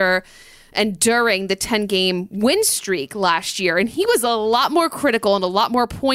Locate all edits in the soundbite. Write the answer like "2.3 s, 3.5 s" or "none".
none